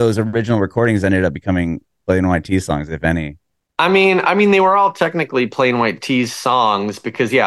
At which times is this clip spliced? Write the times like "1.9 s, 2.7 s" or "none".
none